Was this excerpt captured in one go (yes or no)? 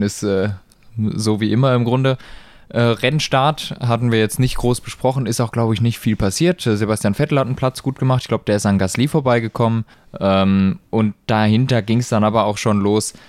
no